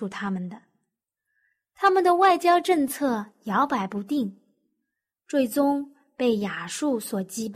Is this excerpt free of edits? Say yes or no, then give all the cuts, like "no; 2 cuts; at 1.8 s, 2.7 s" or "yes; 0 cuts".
yes; 0 cuts